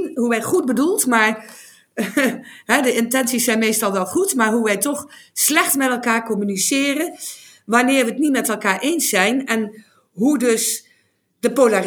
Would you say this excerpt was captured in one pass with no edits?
yes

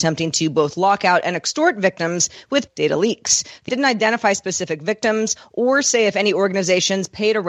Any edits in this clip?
yes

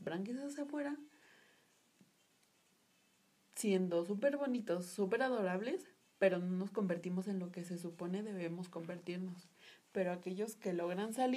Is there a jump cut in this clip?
no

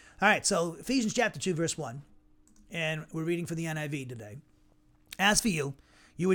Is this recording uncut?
yes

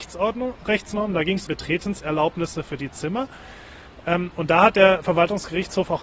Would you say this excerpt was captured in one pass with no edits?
no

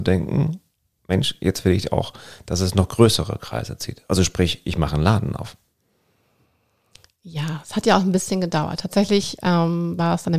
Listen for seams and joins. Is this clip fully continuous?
yes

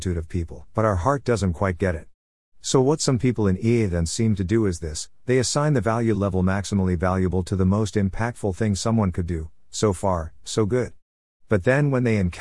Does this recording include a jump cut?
no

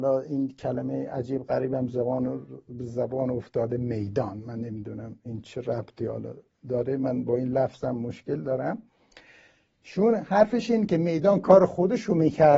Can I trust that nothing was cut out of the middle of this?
yes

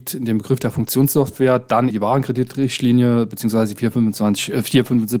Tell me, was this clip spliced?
yes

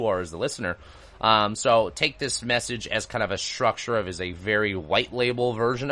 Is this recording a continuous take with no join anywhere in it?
yes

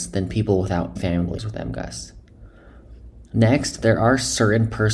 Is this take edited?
yes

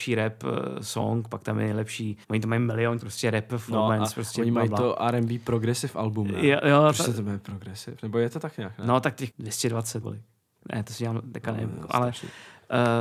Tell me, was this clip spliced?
yes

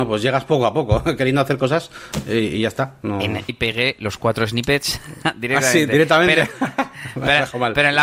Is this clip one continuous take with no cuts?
no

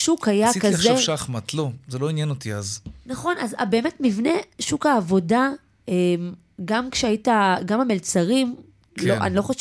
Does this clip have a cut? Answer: no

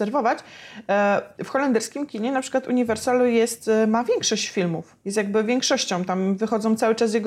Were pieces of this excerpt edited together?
yes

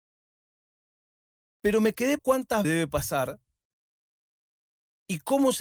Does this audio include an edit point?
yes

